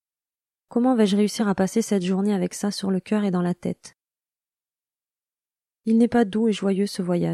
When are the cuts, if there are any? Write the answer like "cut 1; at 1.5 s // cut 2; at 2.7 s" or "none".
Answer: none